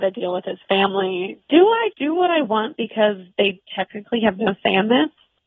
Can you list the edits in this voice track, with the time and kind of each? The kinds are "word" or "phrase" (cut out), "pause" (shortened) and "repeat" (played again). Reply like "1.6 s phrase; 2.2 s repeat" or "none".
1.9 s word

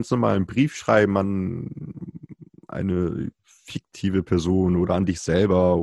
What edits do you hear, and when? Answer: 3.4 s pause

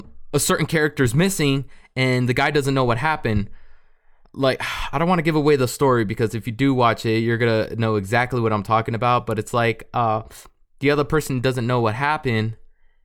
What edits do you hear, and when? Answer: none

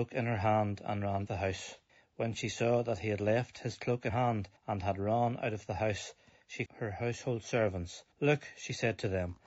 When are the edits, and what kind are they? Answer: 1.3 s phrase; 1.9 s pause; 4.1 s word; 4.6 s pause; 6.7 s word; 8.1 s pause

